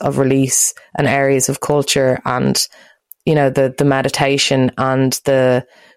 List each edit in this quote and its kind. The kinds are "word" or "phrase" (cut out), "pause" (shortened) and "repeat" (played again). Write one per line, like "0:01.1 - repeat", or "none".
none